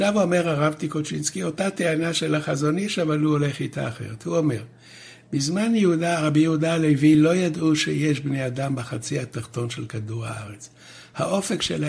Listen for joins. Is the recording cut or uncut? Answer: uncut